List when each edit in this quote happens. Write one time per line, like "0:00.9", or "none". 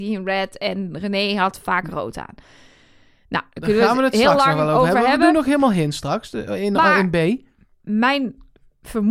none

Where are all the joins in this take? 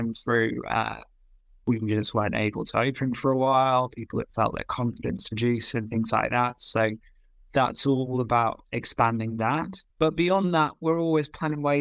0:09.9

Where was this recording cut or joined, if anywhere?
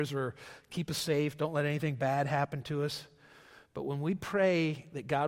none

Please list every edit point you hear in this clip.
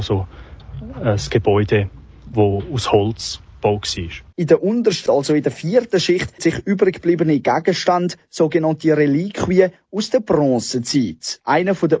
0:02.3
0:04.3
0:05.1
0:06.4

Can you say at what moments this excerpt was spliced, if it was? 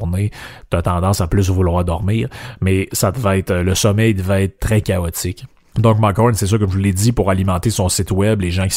0:04.6

